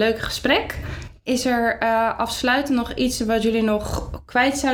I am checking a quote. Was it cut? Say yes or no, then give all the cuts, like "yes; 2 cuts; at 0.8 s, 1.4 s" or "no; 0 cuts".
no; 0 cuts